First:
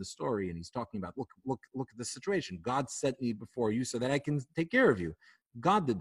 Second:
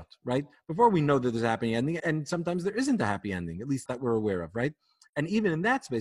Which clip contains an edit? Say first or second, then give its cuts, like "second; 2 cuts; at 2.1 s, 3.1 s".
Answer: second; 2 cuts; at 2.0 s, 3.9 s